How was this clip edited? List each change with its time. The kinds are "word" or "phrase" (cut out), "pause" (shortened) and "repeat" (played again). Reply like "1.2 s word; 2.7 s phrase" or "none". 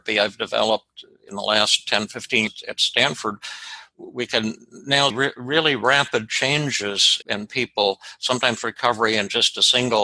2.5 s word; 5.1 s word; 7.2 s word